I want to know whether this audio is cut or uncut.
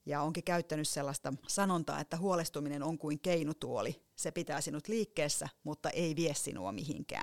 uncut